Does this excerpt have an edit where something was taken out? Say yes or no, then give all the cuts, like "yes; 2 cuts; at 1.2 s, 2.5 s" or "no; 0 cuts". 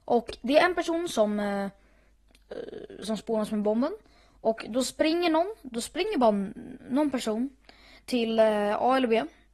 no; 0 cuts